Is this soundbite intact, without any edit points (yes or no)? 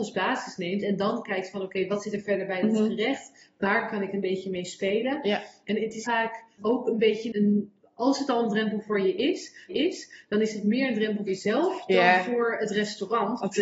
no